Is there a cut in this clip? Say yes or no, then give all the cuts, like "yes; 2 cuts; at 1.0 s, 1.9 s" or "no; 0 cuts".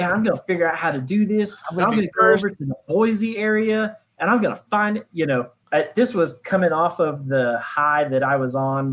yes; 1 cut; at 5.6 s